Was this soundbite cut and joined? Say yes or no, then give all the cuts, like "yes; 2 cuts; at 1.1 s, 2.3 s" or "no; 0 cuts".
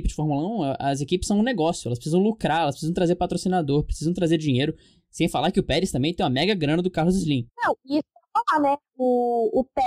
no; 0 cuts